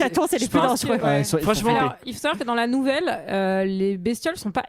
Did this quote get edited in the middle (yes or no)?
no